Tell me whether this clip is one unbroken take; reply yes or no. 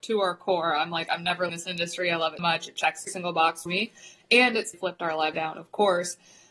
no